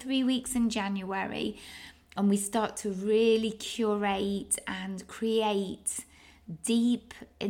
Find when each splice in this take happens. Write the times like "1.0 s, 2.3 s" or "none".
none